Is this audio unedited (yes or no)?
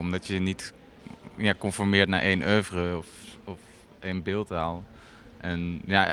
yes